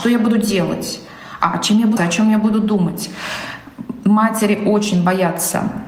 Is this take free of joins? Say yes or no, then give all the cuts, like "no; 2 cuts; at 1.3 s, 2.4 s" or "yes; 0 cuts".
no; 1 cut; at 2.0 s